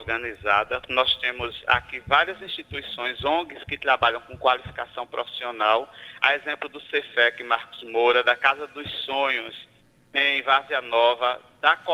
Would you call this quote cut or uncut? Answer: cut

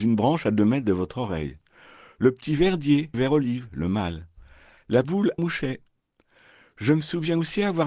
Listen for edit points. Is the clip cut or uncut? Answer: cut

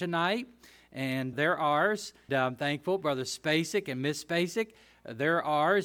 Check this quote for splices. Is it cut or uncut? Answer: cut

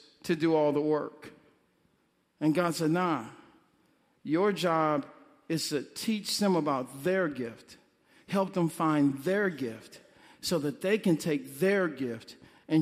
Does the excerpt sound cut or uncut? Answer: uncut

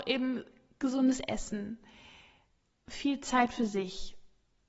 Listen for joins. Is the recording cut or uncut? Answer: uncut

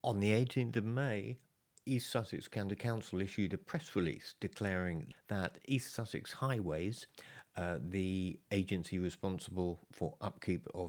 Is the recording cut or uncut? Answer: uncut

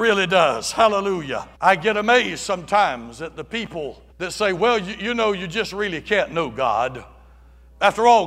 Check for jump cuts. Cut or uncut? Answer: cut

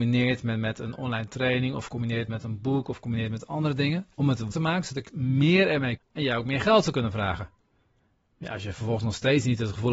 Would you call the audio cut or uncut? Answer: cut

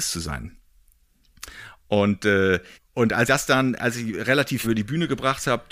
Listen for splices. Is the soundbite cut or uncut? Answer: cut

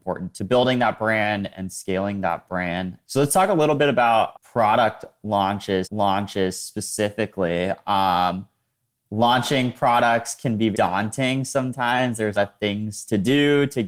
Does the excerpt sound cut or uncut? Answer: cut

